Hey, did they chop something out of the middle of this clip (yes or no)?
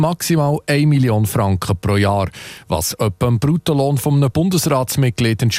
no